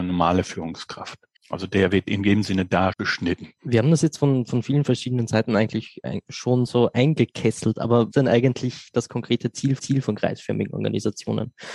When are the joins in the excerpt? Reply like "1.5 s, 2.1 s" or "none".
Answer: 1.4 s, 2.9 s, 3.6 s, 8.1 s, 9.8 s